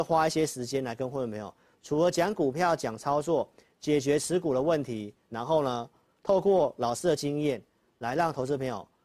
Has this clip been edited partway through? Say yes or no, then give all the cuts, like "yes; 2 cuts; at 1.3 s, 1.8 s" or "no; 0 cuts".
no; 0 cuts